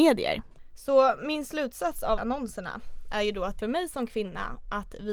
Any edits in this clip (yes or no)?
yes